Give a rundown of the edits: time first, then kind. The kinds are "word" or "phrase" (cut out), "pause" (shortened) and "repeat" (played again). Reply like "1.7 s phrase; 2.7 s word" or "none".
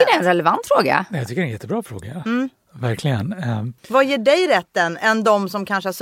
3.8 s pause